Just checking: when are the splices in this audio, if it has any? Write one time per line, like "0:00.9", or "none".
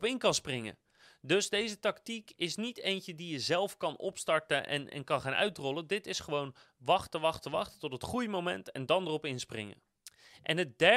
none